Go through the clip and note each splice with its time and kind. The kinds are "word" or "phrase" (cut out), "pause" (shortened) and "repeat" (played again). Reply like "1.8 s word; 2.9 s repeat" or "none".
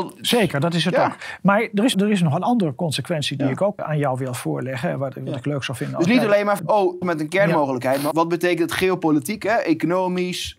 1.9 s word; 3.8 s word; 6.6 s word; 7.0 s word; 8.1 s word